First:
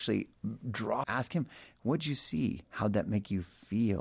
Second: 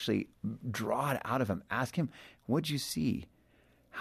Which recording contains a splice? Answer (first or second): first